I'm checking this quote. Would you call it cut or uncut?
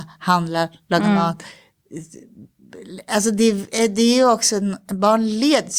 uncut